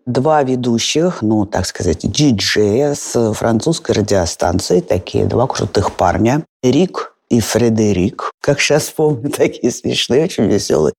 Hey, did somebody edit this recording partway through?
no; 0 cuts

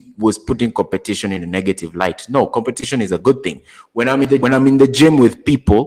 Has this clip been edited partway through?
yes; 1 cut; at 4.4 s

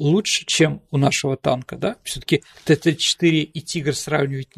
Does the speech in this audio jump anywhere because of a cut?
no; 0 cuts

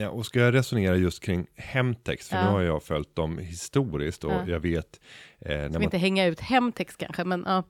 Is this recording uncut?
yes; 0 cuts

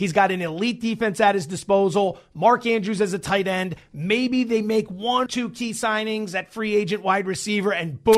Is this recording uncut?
no; 1 cut; at 5.3 s

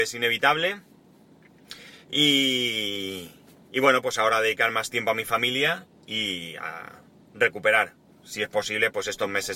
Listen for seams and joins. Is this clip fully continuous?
yes; 0 cuts

